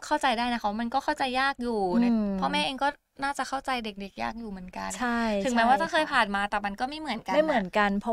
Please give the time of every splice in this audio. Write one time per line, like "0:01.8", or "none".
none